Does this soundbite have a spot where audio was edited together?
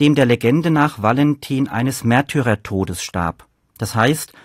no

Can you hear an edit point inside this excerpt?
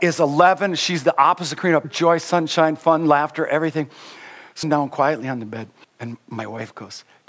yes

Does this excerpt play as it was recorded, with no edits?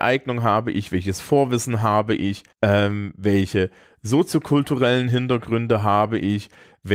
no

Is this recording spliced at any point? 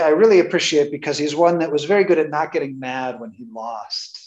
no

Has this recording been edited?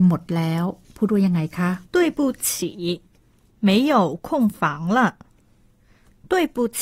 yes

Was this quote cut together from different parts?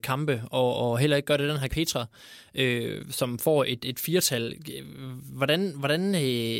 yes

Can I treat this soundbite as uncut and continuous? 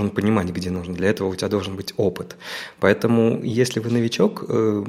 yes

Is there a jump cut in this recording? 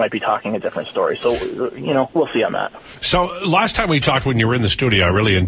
yes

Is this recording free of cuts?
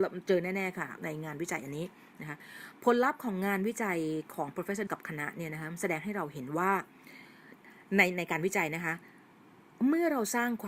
no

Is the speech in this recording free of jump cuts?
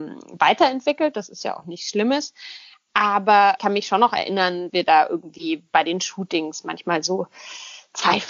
no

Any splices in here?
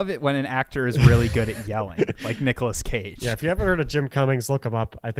no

